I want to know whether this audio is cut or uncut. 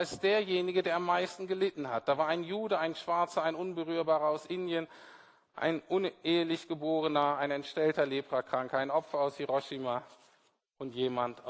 uncut